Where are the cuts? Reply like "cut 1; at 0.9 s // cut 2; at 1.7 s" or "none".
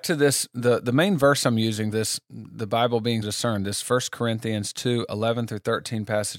cut 1; at 1.9 s // cut 2; at 3.2 s